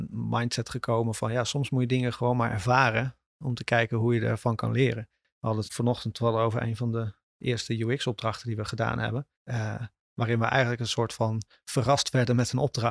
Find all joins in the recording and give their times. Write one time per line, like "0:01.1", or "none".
0:05.7
0:09.3